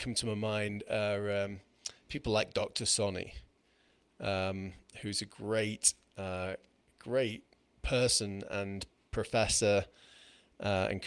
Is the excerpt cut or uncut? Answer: uncut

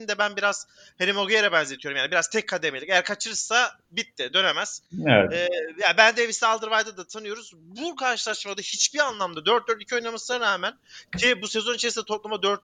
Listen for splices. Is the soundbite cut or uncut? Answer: uncut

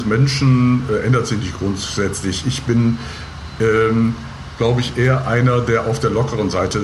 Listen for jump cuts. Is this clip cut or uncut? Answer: uncut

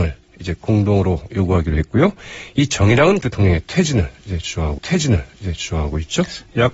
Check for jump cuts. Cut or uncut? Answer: cut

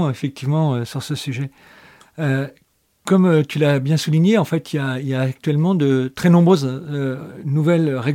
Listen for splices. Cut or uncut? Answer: uncut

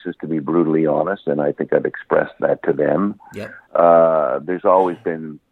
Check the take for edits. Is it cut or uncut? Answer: cut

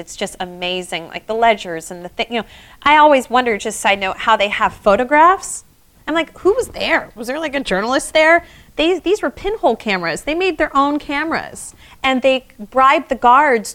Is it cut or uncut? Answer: uncut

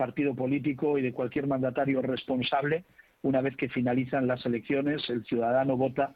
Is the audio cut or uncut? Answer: uncut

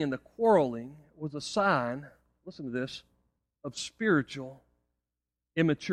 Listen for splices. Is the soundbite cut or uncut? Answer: uncut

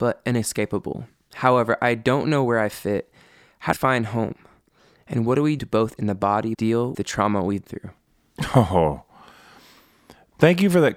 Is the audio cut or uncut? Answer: cut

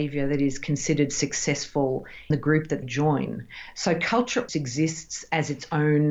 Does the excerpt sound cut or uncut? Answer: cut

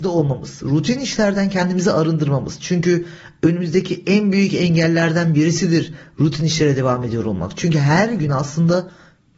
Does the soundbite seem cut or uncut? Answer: uncut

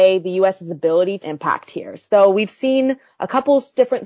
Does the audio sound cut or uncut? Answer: cut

